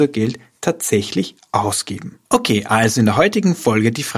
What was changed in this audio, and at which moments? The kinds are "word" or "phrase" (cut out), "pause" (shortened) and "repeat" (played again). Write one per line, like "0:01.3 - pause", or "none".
0:02.3 - pause